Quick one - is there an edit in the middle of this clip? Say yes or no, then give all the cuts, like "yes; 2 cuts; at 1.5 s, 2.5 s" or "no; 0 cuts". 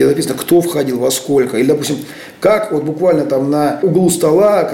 no; 0 cuts